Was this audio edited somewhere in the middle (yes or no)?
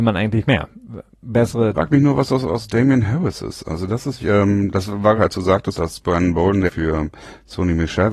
yes